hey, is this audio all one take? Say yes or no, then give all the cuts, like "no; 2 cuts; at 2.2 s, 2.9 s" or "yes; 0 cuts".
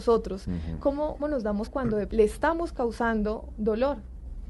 no; 3 cuts; at 1.2 s, 1.7 s, 2.1 s